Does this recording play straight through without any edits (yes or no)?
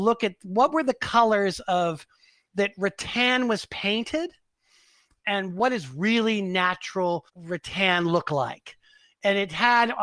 no